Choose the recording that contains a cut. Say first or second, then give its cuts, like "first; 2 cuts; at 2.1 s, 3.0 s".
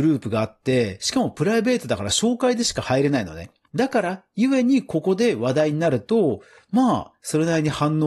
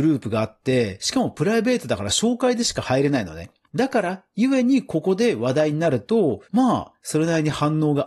second; 1 cut; at 6.5 s